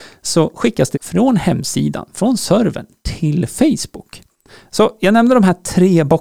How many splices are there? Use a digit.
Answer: 1